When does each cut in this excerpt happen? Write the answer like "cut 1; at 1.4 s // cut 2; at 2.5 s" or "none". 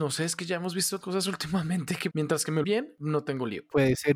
cut 1; at 1.0 s // cut 2; at 2.1 s // cut 3; at 2.6 s